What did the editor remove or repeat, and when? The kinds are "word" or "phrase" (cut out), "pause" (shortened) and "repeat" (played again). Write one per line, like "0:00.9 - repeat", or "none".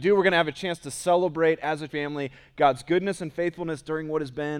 0:01.9 - word

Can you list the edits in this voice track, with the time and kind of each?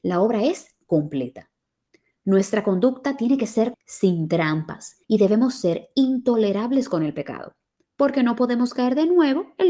0:03.7 - word
0:05.0 - pause

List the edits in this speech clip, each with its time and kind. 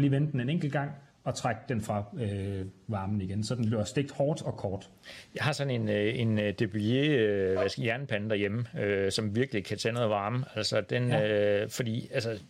0:01.1 - pause

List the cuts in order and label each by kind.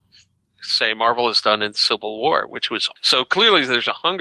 0:02.9 - word

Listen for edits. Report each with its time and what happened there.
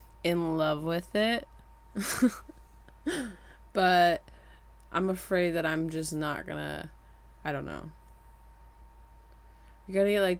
none

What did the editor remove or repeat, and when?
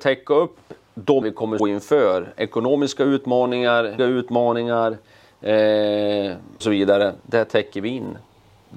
0:01.2 - word
0:01.6 - word
0:04.0 - word
0:06.6 - word

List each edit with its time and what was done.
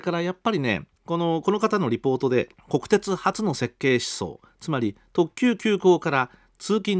0:00.9 - pause
0:02.6 - pause

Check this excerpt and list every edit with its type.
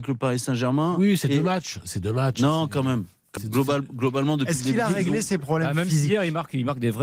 0:03.4 - word

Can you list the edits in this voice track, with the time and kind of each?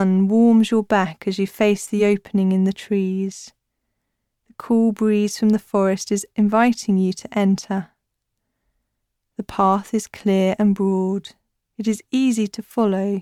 none

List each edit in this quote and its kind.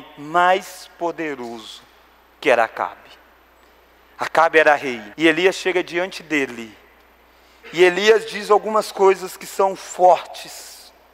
0:05.1 - pause

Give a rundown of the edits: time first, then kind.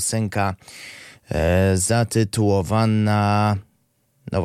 none

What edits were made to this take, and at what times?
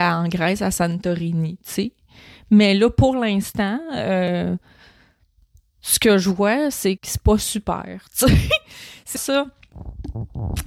0:07.0 - word
0:09.2 - word

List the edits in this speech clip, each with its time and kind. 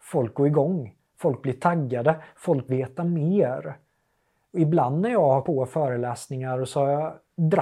0:02.7 - word
0:05.4 - word

